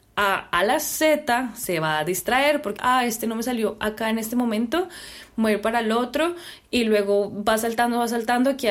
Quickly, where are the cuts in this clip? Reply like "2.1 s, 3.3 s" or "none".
2.8 s